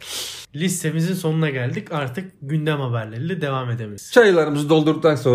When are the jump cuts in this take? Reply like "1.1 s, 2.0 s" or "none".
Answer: none